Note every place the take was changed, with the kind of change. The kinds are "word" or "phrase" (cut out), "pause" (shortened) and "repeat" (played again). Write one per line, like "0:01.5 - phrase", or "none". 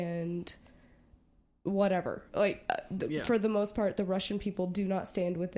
none